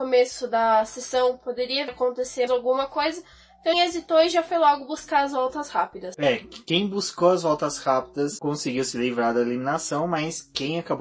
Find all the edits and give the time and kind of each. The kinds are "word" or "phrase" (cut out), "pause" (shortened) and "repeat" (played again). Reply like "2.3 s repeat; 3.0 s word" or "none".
1.9 s word; 2.5 s word; 3.7 s word